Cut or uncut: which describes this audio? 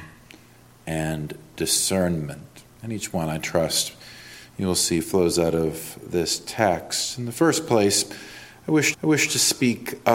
cut